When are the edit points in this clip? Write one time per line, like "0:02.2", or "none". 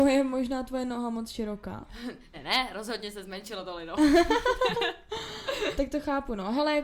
0:02.3
0:05.8